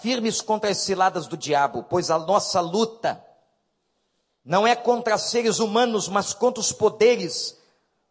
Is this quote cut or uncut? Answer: uncut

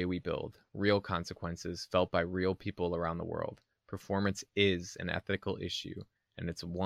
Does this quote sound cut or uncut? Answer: uncut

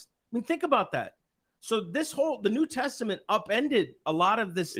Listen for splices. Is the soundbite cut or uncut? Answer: uncut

